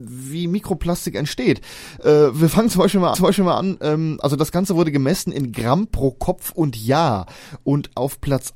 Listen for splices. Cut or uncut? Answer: cut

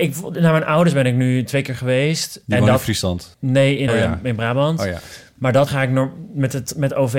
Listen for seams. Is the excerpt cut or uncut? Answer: cut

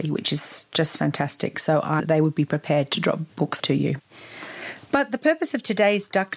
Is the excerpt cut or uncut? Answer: cut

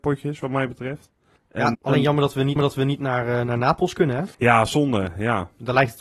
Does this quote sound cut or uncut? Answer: cut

